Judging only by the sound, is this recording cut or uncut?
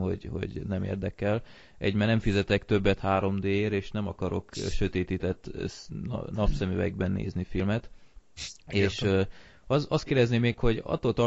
uncut